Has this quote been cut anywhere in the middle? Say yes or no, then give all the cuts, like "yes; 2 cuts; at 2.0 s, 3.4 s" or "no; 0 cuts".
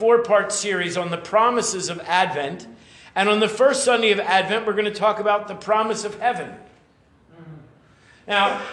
no; 0 cuts